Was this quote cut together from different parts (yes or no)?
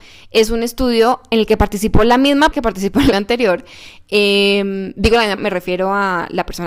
yes